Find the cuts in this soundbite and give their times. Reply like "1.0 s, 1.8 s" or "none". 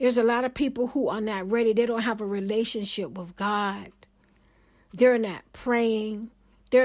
none